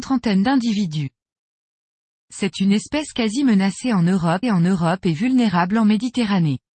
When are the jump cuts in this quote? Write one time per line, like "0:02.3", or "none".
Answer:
0:04.4